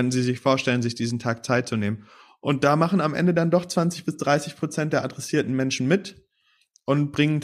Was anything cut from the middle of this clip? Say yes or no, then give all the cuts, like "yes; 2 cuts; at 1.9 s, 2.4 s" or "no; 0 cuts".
no; 0 cuts